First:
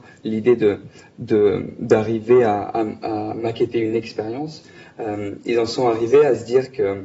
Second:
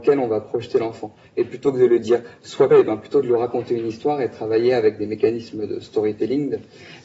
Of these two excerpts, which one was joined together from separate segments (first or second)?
second